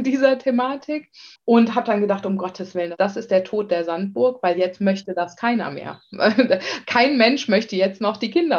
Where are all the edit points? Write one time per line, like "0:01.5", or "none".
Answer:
0:01.4